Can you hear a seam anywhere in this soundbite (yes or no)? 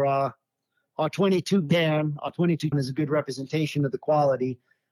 yes